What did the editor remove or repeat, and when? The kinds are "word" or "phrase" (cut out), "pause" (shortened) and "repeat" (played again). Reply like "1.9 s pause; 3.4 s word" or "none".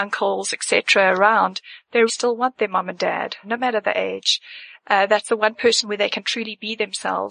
2.1 s word; 3.4 s word

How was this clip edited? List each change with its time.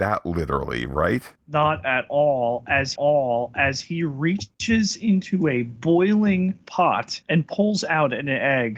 1.4 s pause; 2.9 s repeat; 7.2 s pause

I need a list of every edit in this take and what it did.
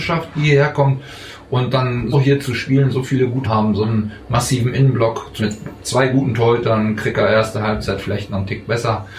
2.1 s word; 3.4 s phrase; 5.4 s word; 7.5 s phrase

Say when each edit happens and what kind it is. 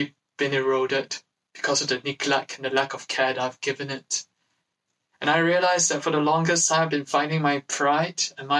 none

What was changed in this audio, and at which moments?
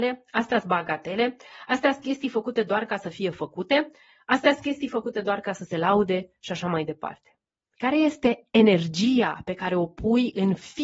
none

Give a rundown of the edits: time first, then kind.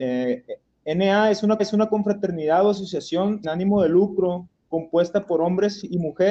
1.6 s repeat; 3.4 s word

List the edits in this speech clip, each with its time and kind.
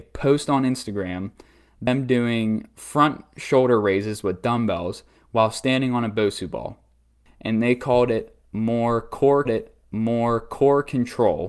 9.4 s repeat

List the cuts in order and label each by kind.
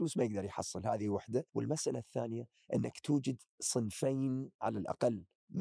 1.5 s pause

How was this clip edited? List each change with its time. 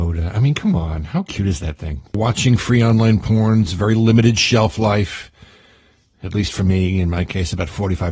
none

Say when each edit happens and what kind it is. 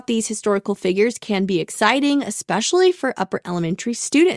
none

